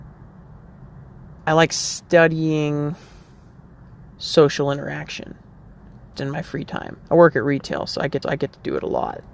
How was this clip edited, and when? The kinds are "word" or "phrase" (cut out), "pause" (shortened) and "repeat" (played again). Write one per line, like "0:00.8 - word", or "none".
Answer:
0:01.4 - pause
0:04.1 - pause
0:06.1 - word
0:07.0 - pause
0:08.2 - repeat